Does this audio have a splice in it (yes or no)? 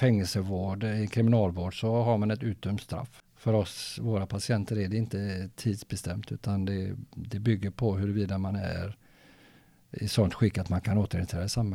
no